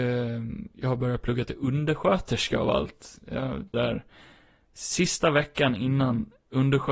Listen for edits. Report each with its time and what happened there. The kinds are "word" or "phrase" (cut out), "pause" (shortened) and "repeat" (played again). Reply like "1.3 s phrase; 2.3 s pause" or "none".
3.7 s word